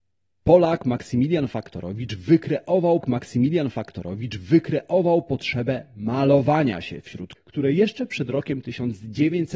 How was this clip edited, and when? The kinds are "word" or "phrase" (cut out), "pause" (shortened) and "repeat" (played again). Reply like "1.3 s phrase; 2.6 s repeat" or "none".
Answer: 3.0 s repeat; 7.4 s word